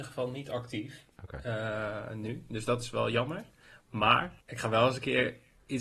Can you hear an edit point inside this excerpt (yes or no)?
yes